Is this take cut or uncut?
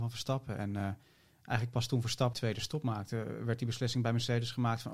cut